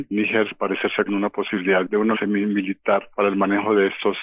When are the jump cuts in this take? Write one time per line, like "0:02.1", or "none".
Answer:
0:01.1
0:02.1